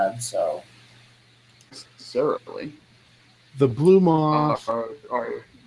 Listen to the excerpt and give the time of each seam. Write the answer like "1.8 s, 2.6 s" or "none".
none